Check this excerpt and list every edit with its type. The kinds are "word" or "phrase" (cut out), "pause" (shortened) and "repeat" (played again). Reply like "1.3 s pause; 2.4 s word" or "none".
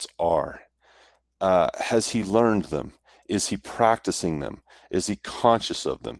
none